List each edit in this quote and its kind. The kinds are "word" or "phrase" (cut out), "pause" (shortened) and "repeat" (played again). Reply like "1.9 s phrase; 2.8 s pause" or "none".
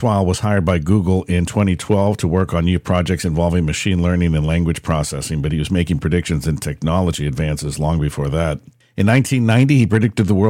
none